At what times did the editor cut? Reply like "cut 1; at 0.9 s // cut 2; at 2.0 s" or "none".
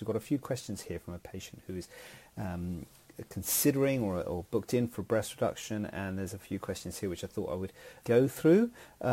cut 1; at 8.0 s